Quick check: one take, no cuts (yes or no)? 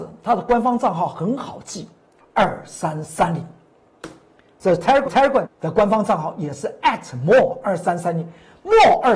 no